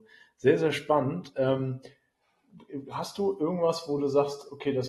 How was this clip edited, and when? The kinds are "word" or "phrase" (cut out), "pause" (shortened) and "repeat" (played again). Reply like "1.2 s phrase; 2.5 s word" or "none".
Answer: none